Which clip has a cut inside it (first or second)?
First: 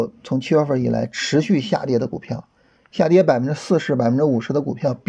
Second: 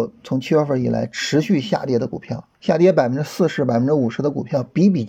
second